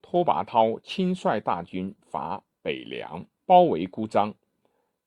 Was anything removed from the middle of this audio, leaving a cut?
yes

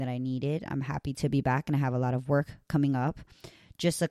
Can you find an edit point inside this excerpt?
no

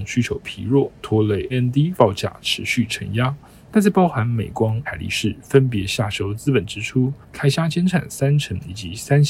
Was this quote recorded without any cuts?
no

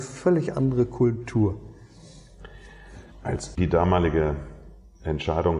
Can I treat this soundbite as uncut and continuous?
no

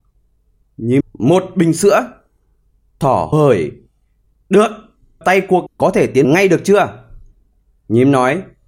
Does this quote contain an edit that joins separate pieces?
yes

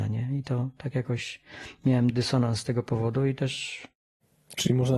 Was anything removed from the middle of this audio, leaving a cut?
no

